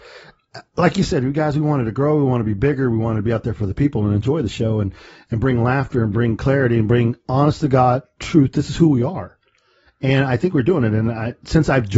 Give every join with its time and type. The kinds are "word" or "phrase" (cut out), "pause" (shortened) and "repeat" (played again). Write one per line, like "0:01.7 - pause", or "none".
none